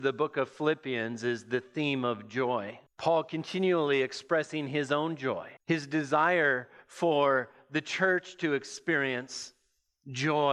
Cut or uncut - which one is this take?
cut